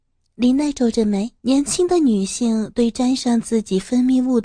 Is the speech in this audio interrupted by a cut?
yes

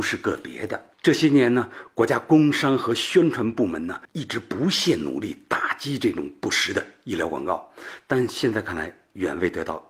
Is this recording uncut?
no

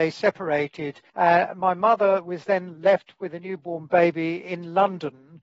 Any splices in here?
yes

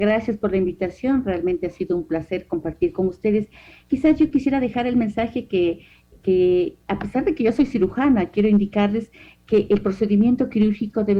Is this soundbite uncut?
yes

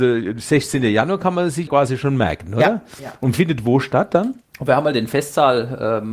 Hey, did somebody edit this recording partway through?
yes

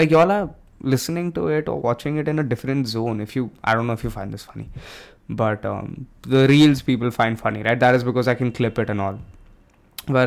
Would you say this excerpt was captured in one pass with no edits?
yes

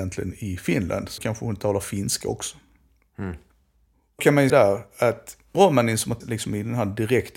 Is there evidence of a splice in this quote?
yes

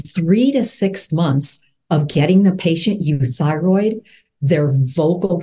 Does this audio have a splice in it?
no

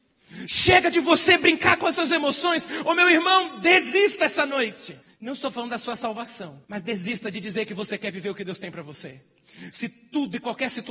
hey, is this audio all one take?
no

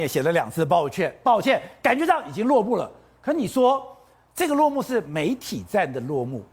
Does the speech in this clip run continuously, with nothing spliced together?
yes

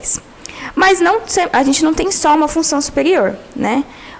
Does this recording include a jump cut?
no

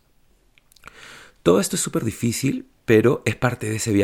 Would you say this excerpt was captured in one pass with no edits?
yes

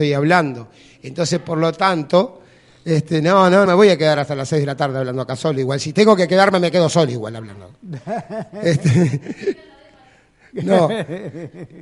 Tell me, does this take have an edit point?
yes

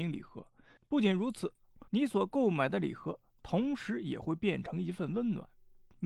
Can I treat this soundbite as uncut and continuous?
no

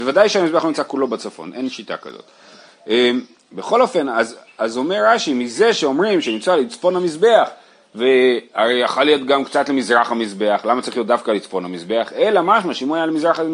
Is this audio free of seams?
yes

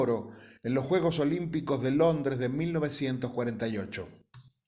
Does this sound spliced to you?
no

